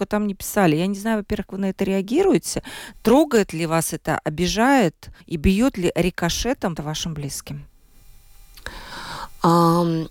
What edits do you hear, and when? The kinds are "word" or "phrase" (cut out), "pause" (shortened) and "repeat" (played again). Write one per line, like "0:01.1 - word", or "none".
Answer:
0:01.5 - word
0:05.2 - pause
0:06.8 - phrase